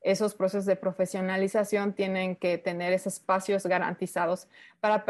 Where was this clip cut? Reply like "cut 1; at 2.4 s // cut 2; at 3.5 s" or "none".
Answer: none